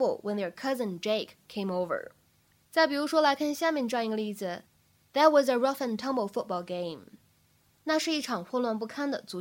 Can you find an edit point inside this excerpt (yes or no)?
no